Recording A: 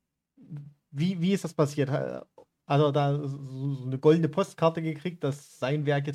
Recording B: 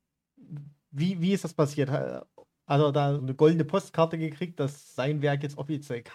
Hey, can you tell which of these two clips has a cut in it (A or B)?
B